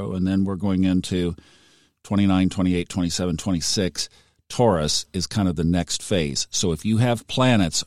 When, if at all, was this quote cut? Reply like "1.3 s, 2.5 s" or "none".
none

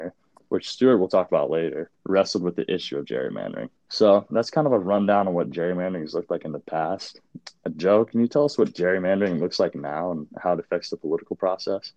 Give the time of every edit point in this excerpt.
1.9 s, 3.8 s

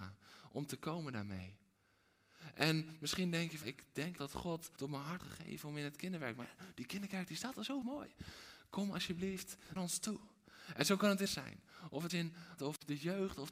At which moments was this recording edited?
3.6 s, 4.2 s, 4.8 s, 5.2 s, 7.8 s, 9.8 s, 11.3 s, 12.1 s, 12.6 s

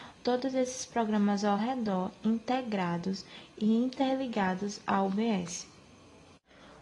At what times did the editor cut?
none

